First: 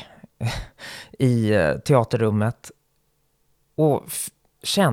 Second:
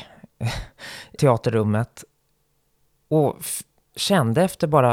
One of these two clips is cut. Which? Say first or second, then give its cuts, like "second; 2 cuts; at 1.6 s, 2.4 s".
second; 1 cut; at 1.2 s